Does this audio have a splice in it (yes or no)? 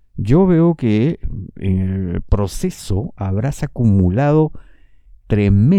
no